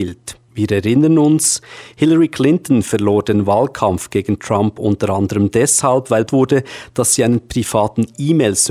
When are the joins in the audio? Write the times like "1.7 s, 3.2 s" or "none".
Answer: 6.3 s